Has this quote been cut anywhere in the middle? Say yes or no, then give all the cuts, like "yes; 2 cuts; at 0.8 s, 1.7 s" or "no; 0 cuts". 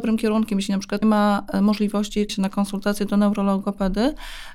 yes; 2 cuts; at 1.0 s, 2.3 s